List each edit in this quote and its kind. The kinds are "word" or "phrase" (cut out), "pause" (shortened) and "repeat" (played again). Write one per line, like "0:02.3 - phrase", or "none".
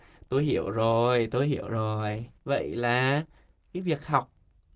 0:02.4 - pause

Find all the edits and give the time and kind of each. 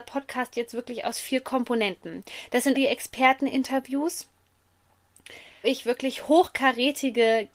0:02.7 - word
0:05.6 - word

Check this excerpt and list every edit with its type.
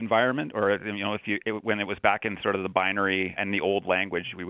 0:03.4 - word

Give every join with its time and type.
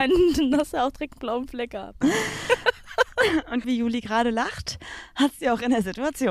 0:03.6 - word

